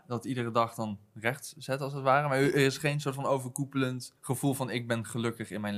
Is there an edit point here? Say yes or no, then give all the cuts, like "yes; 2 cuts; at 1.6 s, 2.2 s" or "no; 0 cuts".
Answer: yes; 1 cut; at 4.2 s